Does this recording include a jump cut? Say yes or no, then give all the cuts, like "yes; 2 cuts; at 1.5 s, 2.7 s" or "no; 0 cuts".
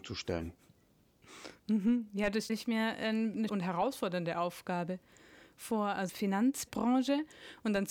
yes; 3 cuts; at 2.5 s, 3.5 s, 6.1 s